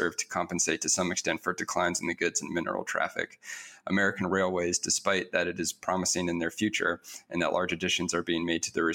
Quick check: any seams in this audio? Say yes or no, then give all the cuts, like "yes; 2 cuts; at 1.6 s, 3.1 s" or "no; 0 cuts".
no; 0 cuts